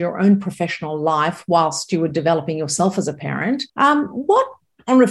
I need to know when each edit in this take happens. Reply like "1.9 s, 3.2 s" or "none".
3.7 s

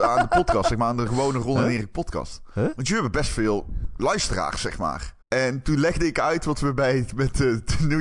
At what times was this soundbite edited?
5.2 s

